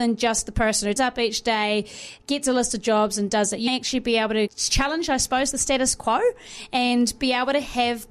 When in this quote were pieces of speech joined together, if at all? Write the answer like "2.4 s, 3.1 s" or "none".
1.0 s, 3.7 s, 4.5 s